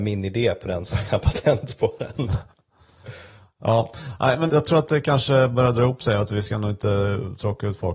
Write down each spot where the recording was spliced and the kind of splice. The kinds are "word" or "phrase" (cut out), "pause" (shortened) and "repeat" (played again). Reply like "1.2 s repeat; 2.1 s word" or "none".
4.5 s word